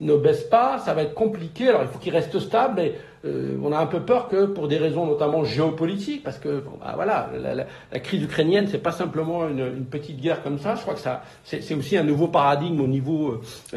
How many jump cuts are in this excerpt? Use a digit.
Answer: 0